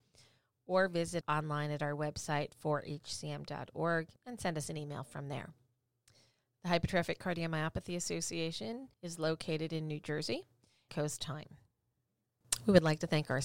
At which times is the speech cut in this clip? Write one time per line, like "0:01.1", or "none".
0:01.2
0:04.2
0:05.9
0:08.9
0:10.9